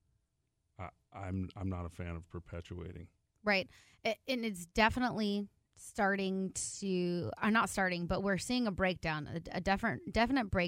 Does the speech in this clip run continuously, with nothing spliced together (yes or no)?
yes